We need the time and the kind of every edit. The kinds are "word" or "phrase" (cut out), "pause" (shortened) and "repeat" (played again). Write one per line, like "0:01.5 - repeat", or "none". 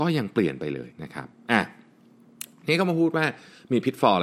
0:00.9 - pause